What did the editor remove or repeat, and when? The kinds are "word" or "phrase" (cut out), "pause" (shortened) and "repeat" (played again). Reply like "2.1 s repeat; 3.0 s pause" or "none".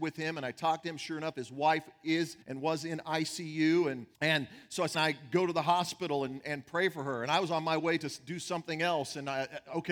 2.4 s pause; 4.1 s pause; 4.9 s phrase